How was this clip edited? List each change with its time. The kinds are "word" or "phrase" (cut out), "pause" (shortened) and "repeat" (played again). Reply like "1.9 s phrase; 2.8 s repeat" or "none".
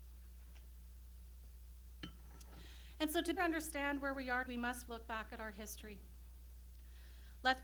3.4 s word; 4.5 s word; 4.9 s word